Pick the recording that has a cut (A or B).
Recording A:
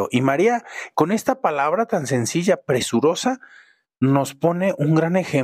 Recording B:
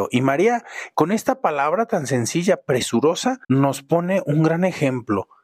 B